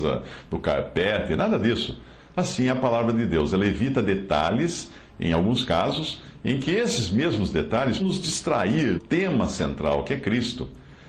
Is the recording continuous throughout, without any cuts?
no; 2 cuts; at 8.0 s, 9.0 s

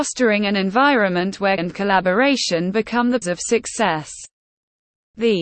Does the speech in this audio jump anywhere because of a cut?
yes; 2 cuts; at 1.6 s, 3.2 s

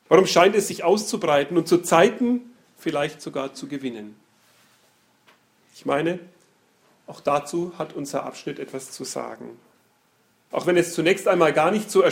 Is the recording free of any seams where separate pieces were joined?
yes; 0 cuts

